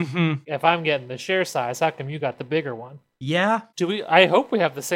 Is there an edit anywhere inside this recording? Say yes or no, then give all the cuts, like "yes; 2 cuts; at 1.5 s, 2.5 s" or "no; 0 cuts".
no; 0 cuts